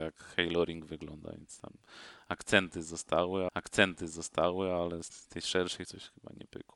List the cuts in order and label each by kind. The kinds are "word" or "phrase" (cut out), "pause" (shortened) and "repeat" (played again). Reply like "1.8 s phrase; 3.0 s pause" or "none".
3.5 s repeat; 5.1 s word; 5.8 s word